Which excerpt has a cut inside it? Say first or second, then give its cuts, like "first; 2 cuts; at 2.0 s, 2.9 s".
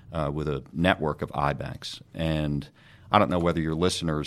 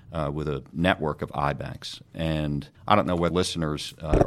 second; 2 cuts; at 2.8 s, 3.3 s